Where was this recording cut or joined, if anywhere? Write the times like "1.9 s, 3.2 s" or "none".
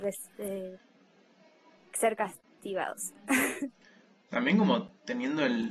none